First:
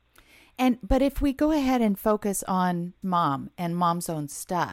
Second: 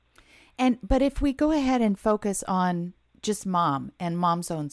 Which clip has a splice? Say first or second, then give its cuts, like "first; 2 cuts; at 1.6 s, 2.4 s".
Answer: first; 1 cut; at 3.0 s